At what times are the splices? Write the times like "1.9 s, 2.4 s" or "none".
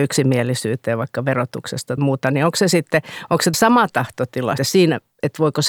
2.0 s, 3.5 s, 4.6 s